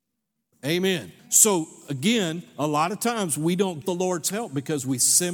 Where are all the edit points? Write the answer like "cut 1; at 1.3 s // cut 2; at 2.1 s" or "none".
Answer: cut 1; at 1.2 s // cut 2; at 3.8 s